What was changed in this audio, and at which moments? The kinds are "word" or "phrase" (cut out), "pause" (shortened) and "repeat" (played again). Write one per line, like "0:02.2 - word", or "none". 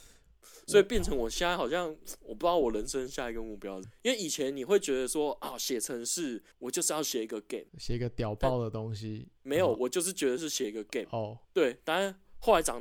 0:06.5 - pause
0:07.7 - pause
0:09.4 - pause
0:11.4 - pause